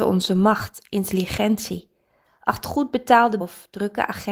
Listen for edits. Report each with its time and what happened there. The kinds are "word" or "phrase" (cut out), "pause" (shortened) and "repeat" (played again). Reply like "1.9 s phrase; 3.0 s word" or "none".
2.6 s word; 3.4 s word